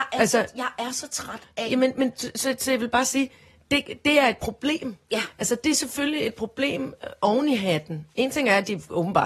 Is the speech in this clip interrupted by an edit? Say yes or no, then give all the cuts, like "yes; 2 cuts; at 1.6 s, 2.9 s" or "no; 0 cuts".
no; 0 cuts